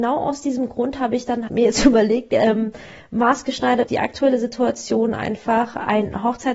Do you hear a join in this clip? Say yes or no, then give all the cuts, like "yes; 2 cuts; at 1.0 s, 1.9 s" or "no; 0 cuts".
yes; 2 cuts; at 1.5 s, 3.9 s